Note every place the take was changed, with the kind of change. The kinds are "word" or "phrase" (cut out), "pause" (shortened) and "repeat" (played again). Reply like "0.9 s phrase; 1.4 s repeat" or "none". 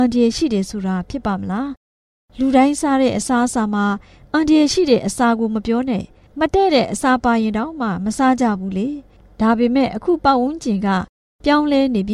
none